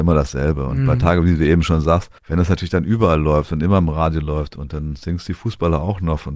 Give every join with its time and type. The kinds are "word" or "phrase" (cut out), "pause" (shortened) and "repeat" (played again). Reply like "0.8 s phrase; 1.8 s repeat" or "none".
2.2 s pause